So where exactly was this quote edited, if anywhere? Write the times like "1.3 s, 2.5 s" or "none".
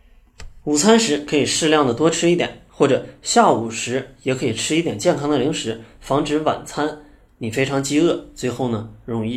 none